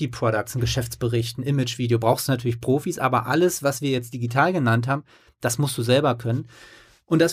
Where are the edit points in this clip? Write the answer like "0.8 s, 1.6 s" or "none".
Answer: none